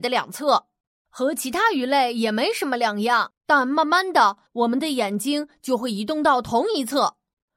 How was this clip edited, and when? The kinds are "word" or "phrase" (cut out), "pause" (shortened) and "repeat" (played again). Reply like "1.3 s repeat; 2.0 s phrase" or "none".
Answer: 3.4 s pause; 4.5 s pause